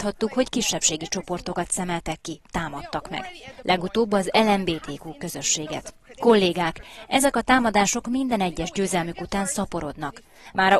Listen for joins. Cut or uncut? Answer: uncut